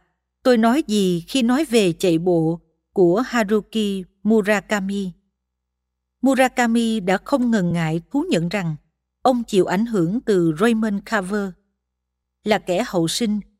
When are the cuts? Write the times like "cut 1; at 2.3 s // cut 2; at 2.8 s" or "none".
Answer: none